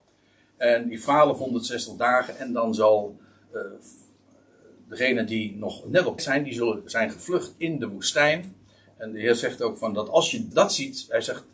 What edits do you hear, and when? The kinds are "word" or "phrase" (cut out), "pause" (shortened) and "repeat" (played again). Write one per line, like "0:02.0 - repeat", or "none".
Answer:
0:01.1 - word
0:06.2 - word
0:06.9 - word
0:10.5 - word